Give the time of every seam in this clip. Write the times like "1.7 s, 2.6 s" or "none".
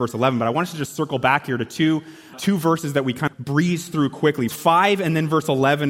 2.3 s, 3.3 s, 4.5 s